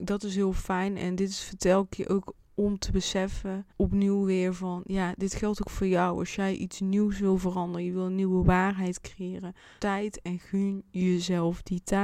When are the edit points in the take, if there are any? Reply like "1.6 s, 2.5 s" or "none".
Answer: 2.4 s, 3.7 s, 9.8 s